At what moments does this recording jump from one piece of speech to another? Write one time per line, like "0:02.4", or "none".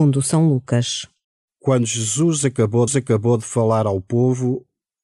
0:01.2
0:02.9